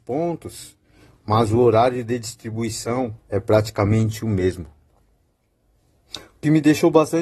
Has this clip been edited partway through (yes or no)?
yes